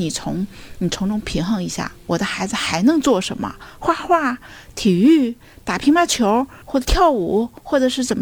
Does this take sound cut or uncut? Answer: cut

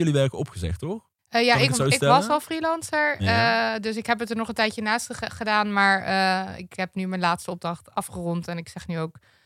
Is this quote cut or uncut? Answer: cut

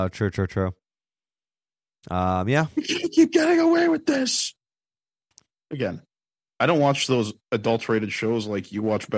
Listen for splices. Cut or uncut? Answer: cut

